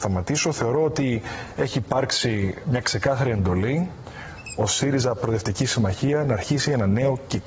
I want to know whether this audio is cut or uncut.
uncut